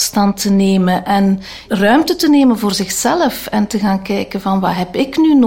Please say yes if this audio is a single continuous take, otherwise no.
yes